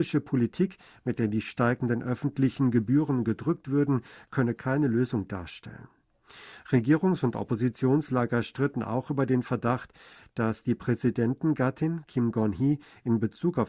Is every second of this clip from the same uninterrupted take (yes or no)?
yes